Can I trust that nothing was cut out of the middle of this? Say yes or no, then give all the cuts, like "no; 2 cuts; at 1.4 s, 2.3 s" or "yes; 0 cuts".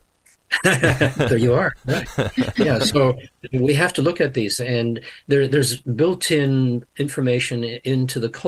no; 1 cut; at 4.6 s